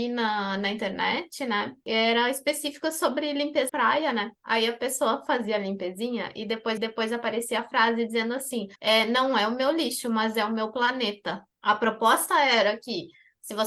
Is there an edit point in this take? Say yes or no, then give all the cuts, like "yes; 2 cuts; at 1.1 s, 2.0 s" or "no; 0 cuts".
yes; 4 cuts; at 3.7 s, 6.8 s, 8.8 s, 11.5 s